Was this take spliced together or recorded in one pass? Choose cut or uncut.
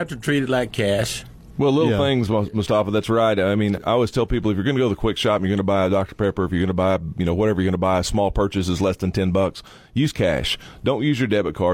cut